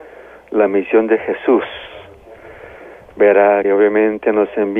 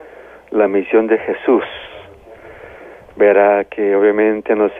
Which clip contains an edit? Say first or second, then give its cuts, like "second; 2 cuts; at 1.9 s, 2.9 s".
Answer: first; 1 cut; at 3.6 s